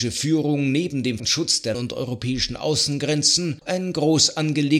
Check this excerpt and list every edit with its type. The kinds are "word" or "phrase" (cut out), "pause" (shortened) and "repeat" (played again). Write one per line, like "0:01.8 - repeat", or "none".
0:01.2 - word
0:01.7 - word
0:03.6 - word

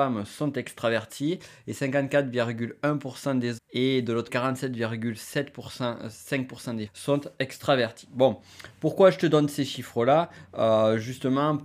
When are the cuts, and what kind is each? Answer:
0:03.6 - word
0:04.3 - word
0:06.9 - word

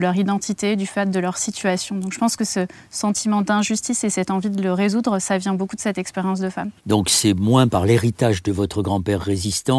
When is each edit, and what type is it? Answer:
0:06.8 - pause

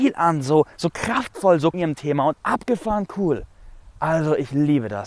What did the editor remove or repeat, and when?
0:01.7 - phrase
0:02.3 - phrase

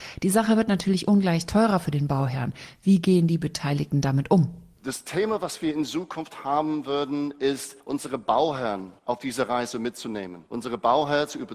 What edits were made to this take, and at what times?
0:07.8 - pause
0:09.0 - pause
0:10.5 - pause

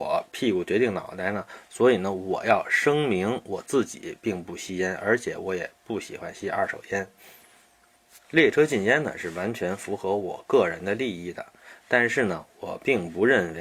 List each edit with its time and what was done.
none

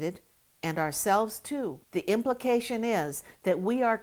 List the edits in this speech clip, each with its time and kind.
0:01.8 - pause

